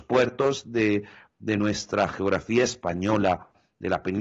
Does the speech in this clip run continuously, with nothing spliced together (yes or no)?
yes